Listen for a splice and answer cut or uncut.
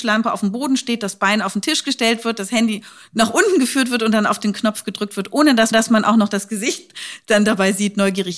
cut